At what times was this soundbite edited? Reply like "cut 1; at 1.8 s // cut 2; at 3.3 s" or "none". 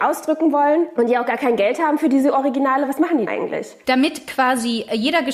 cut 1; at 3.3 s